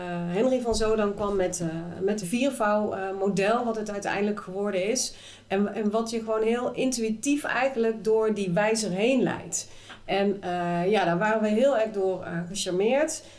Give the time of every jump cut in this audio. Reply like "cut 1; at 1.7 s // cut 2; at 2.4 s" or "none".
cut 1; at 2.2 s

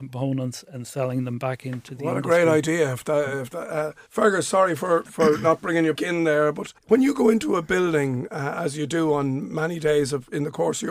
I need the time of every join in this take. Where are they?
cut 1; at 4.1 s // cut 2; at 5.0 s // cut 3; at 5.9 s // cut 4; at 6.8 s

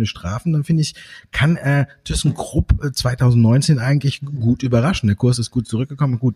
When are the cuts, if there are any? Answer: none

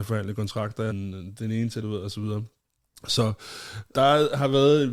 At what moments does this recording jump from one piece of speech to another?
cut 1; at 0.9 s // cut 2; at 1.8 s // cut 3; at 3.9 s

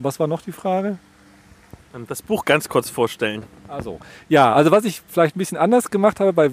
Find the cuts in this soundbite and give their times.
none

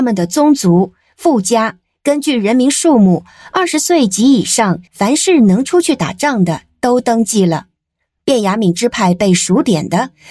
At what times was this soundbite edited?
cut 1; at 4.9 s

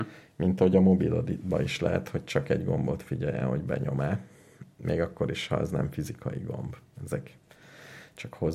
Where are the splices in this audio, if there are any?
none

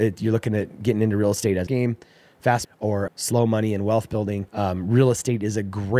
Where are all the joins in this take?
cut 1; at 1.7 s // cut 2; at 2.6 s // cut 3; at 3.1 s // cut 4; at 4.5 s

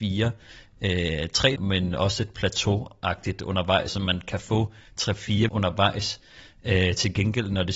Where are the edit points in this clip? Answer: cut 1; at 1.6 s // cut 2; at 3.9 s // cut 3; at 5.5 s

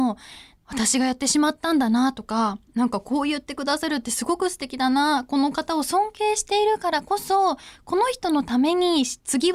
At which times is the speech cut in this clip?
cut 1; at 2.7 s

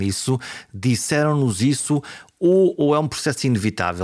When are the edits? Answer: cut 1; at 2.7 s

